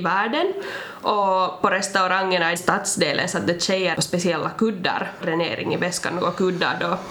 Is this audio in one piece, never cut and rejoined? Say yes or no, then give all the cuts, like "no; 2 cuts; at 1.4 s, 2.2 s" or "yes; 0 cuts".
no; 3 cuts; at 2.6 s, 3.9 s, 5.2 s